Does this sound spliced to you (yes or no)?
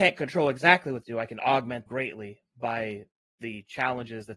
yes